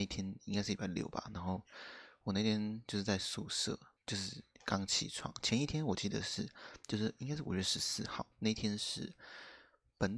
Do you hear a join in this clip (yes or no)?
yes